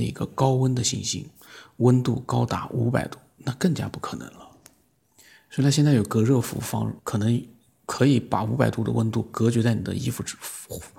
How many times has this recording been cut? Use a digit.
1